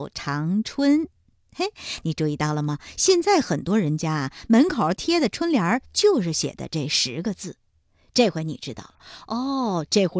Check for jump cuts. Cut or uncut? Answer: uncut